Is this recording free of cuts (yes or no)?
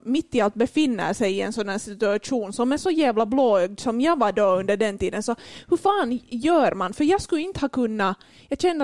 yes